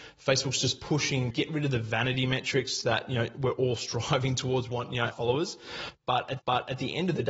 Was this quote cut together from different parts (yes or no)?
yes